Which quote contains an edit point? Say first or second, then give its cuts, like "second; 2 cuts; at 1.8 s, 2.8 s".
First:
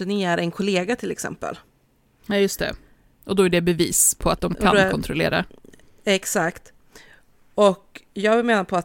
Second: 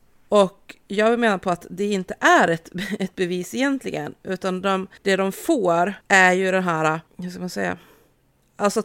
second; 3 cuts; at 5.0 s, 6.0 s, 7.1 s